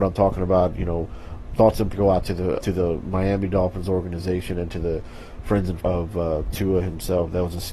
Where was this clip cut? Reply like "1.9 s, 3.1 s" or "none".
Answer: 1.9 s, 2.6 s, 5.8 s